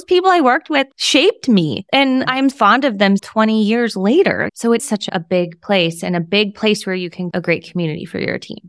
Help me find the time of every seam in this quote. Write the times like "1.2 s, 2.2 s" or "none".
2.5 s, 3.2 s, 4.8 s, 7.3 s